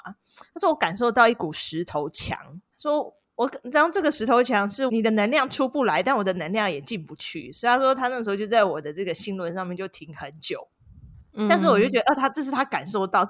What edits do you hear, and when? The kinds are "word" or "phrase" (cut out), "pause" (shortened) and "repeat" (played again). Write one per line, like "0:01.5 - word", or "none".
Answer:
0:02.7 - pause